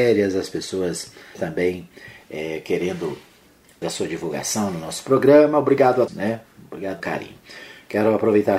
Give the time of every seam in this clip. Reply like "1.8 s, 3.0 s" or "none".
1.3 s, 3.8 s, 6.1 s, 7.0 s

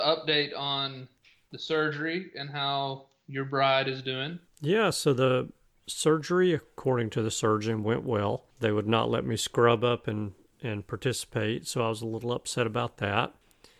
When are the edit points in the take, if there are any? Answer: none

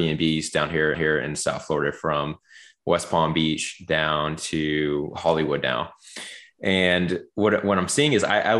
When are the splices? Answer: 0.9 s

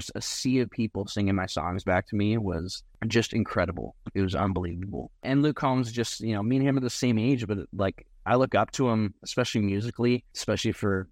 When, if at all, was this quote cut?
none

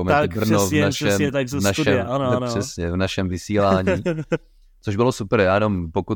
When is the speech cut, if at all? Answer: none

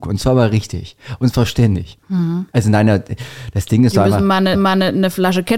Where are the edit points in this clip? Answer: 2.5 s, 4.5 s

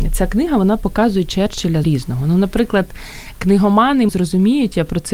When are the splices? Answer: 1.8 s, 4.1 s

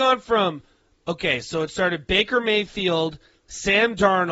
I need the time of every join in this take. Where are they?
none

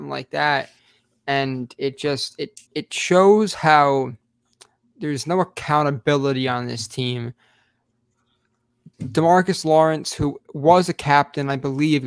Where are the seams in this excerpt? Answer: 2.7 s, 8.9 s

